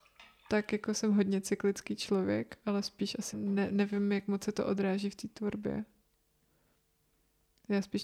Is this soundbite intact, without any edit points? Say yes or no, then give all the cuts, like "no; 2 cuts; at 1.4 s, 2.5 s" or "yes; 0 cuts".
no; 1 cut; at 3.3 s